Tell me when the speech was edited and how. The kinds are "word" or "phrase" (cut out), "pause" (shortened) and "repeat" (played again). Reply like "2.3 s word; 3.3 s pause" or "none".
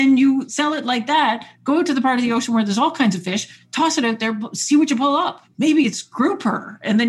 none